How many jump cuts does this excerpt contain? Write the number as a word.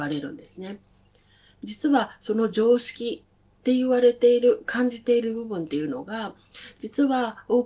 zero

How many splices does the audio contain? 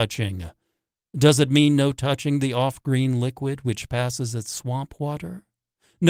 zero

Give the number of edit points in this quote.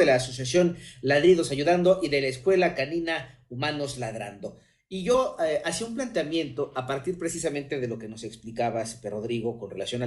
zero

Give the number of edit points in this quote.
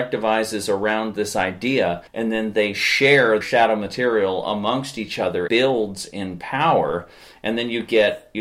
three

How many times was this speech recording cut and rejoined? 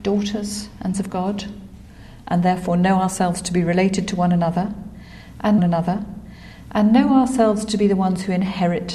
two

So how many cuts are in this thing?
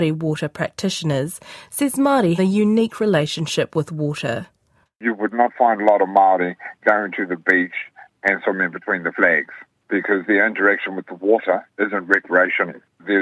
one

